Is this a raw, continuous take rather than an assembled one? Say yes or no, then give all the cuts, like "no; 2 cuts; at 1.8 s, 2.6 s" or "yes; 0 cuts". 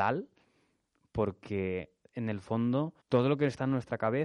no; 1 cut; at 3.0 s